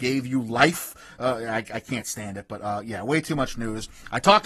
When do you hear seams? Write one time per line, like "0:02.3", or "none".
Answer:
none